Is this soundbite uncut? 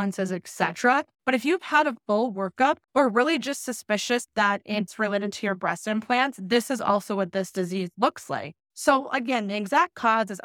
no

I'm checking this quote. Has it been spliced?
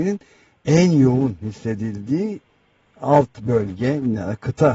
no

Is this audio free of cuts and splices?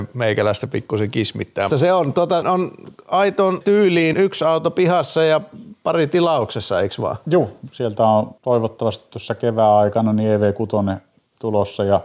no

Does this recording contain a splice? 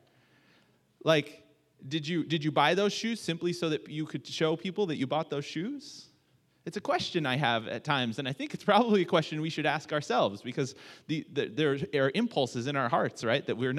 no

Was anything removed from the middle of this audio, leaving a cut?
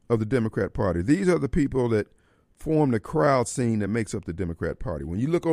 no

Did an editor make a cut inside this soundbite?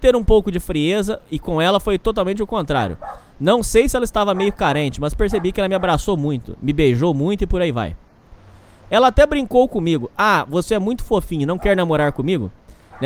no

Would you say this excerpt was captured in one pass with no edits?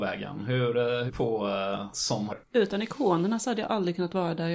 no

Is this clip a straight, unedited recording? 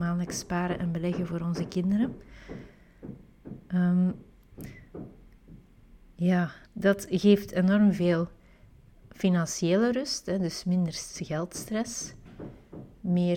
no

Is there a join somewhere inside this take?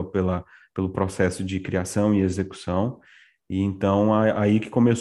no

